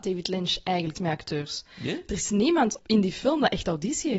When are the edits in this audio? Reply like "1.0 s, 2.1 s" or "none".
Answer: 0.9 s, 2.8 s